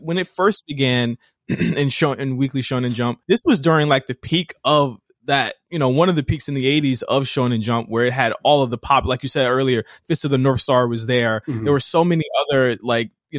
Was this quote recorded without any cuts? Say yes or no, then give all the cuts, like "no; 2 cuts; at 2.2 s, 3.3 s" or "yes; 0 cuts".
no; 1 cut; at 3.2 s